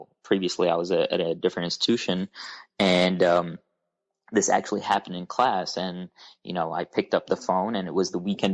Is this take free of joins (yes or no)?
yes